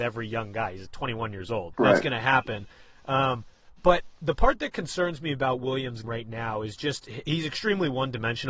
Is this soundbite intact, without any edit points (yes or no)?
no